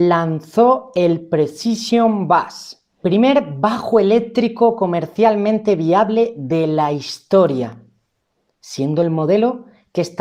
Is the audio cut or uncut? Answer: cut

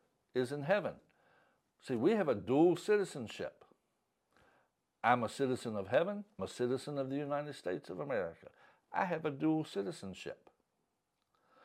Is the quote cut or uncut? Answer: cut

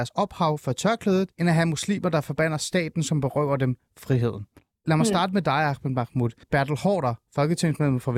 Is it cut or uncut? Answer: cut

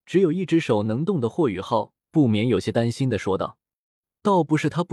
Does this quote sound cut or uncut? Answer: uncut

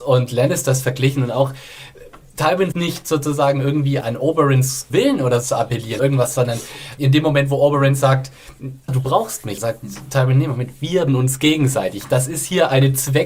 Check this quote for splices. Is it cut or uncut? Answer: cut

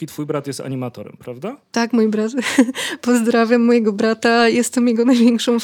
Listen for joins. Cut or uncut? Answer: uncut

